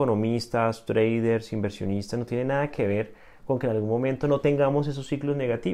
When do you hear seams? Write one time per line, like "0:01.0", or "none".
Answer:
none